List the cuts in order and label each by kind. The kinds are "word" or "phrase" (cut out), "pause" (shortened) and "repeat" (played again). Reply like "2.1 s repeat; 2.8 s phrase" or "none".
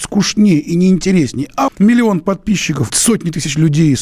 1.7 s phrase; 2.9 s word